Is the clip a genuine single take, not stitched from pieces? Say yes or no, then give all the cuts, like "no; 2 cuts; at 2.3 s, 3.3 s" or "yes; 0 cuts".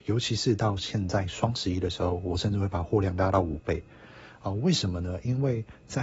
yes; 0 cuts